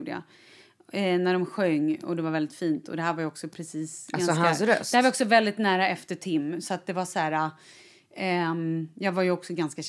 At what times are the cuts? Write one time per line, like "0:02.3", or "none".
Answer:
none